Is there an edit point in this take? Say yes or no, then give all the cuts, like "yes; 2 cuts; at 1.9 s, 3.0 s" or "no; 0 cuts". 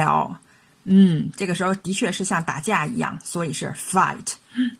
no; 0 cuts